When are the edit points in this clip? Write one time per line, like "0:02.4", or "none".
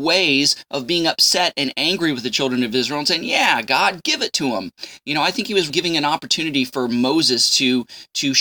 0:05.7